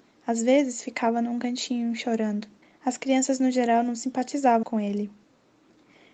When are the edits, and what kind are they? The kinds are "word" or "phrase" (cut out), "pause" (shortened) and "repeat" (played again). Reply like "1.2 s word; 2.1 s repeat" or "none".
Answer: 2.6 s pause; 4.6 s word